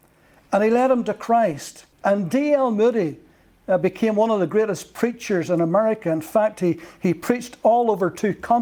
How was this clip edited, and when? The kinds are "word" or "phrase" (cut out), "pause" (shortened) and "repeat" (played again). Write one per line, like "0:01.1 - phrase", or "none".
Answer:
0:01.9 - pause